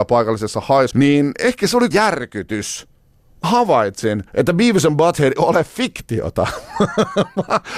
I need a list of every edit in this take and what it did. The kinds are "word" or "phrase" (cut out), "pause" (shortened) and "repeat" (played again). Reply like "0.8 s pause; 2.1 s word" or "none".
0.9 s word; 1.9 s word; 3.4 s word; 4.3 s pause; 5.4 s word